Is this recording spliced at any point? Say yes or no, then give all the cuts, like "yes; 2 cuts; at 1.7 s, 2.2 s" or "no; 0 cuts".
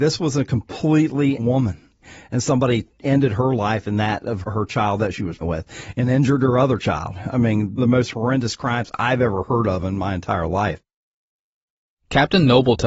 yes; 3 cuts; at 1.4 s, 5.4 s, 7.8 s